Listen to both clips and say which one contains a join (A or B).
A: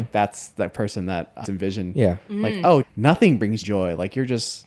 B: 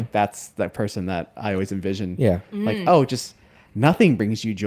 A